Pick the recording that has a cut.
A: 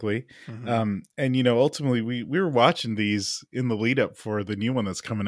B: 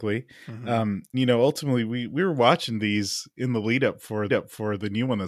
B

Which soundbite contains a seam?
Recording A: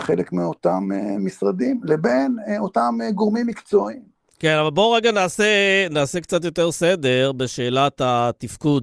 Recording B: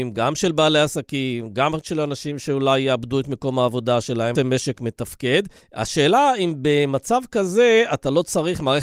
B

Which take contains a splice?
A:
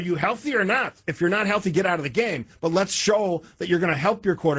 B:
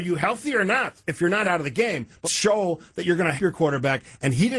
B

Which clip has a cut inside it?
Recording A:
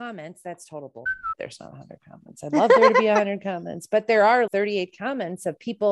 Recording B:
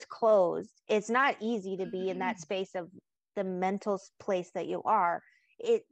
A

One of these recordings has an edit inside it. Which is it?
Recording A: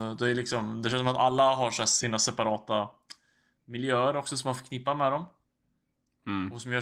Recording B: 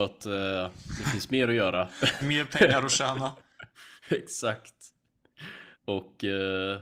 B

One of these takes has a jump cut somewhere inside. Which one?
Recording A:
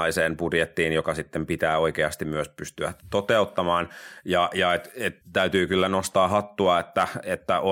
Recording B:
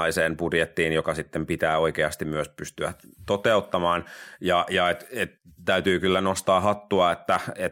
A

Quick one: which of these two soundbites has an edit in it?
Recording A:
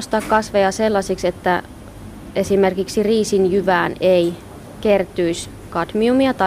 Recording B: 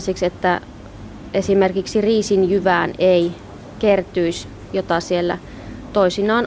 B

